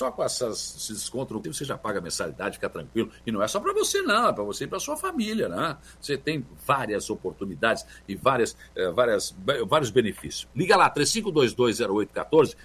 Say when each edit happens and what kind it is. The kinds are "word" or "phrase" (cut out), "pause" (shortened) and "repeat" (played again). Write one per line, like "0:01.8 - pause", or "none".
0:01.4 - word